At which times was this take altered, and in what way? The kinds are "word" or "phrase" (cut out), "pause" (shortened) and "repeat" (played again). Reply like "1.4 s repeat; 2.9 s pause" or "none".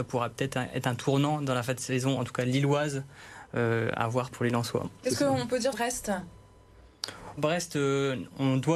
4.3 s word; 5.7 s word; 7.4 s word